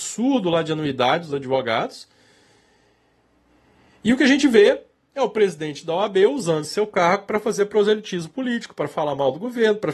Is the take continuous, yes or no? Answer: yes